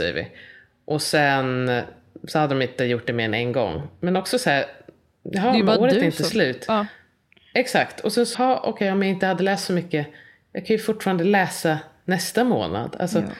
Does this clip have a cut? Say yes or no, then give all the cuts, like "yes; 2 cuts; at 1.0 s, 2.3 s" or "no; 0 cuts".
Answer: yes; 1 cut; at 8.3 s